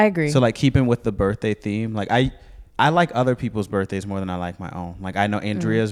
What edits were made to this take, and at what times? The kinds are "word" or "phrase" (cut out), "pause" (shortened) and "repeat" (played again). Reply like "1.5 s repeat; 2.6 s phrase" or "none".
2.7 s pause